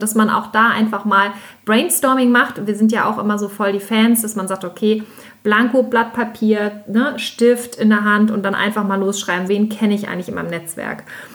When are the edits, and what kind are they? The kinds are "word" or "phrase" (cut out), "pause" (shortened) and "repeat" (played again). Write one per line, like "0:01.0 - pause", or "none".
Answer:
0:09.5 - word